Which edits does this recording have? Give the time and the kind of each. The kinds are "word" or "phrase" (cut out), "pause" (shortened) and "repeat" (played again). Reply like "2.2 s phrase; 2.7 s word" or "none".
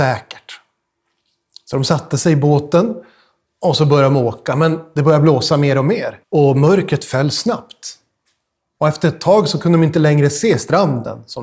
6.2 s pause